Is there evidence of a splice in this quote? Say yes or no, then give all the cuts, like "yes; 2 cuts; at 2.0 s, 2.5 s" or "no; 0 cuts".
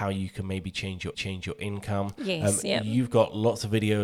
yes; 1 cut; at 1.1 s